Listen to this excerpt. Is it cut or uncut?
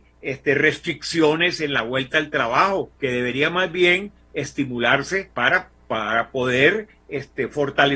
cut